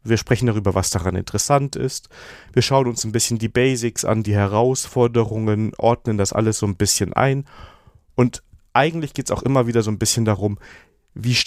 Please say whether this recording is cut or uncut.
uncut